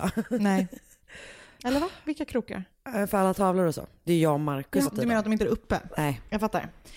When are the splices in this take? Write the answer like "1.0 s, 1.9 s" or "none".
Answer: 1.4 s, 4.8 s, 5.4 s